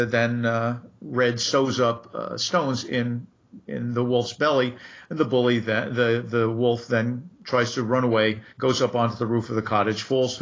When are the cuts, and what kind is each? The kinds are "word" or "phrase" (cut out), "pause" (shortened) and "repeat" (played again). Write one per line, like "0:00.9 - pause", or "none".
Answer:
0:08.5 - pause